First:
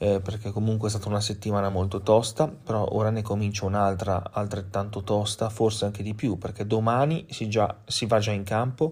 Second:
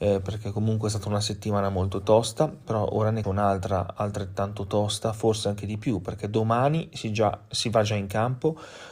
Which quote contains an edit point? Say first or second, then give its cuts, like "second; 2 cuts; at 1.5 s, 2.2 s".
second; 1 cut; at 3.2 s